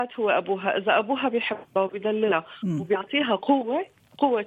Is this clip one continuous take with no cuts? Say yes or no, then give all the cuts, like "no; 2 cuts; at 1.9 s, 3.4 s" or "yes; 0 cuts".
yes; 0 cuts